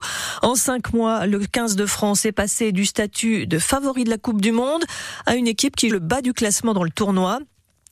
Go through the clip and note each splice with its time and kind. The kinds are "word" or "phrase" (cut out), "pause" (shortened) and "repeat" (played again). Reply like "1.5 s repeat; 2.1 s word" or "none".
5.9 s word